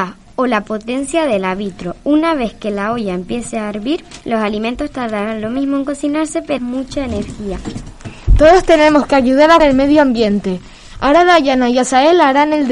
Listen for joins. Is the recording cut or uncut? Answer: cut